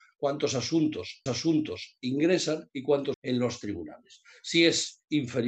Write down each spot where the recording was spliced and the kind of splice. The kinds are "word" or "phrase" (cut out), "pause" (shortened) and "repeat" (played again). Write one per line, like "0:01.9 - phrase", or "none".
0:01.3 - repeat
0:03.1 - phrase